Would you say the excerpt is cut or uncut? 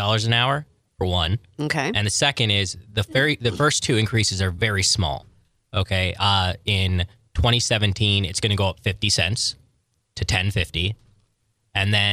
uncut